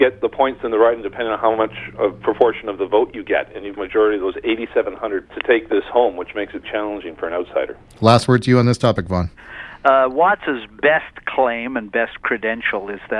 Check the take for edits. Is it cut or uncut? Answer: cut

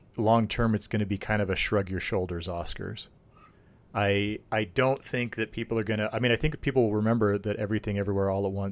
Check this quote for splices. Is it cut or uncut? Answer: uncut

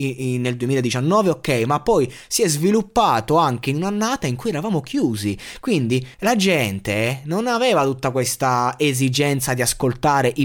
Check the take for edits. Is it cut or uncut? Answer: cut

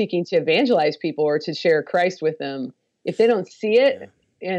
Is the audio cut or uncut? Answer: uncut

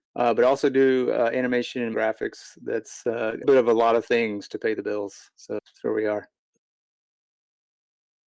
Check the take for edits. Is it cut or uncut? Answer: cut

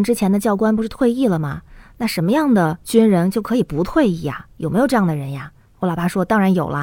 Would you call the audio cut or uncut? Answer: uncut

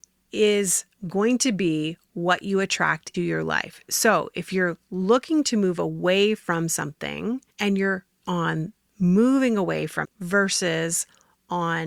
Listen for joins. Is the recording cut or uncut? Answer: cut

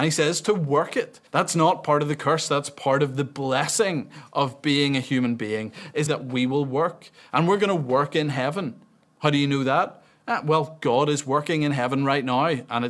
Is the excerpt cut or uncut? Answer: cut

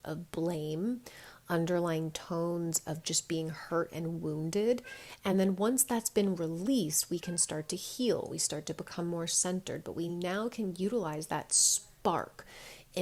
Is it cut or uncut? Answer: uncut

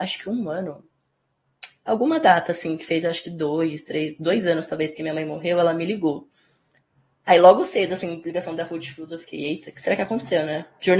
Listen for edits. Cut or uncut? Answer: uncut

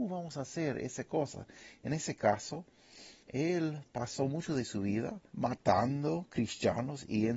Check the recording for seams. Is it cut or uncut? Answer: cut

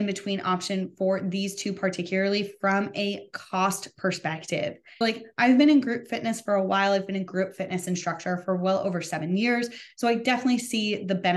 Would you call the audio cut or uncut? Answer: cut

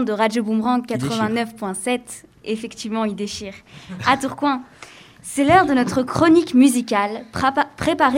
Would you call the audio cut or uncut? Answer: uncut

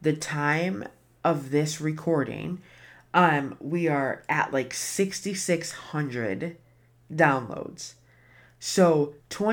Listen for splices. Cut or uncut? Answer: uncut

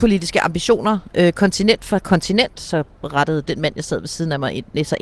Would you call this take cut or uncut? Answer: uncut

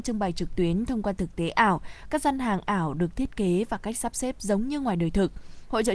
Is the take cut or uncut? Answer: uncut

